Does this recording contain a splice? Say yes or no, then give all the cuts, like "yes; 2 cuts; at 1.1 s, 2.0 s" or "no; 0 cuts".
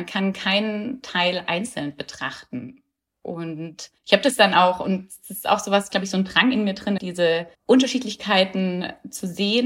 yes; 4 cuts; at 4.0 s, 5.9 s, 7.0 s, 7.5 s